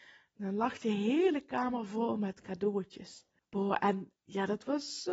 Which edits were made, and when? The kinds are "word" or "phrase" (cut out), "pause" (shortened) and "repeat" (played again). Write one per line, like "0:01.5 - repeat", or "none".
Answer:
0:03.4 - pause
0:04.2 - pause